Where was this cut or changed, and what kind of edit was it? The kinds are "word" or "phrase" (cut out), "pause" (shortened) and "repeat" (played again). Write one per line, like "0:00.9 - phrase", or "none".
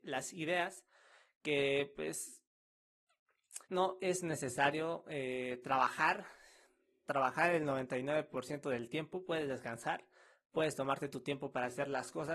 0:03.6 - pause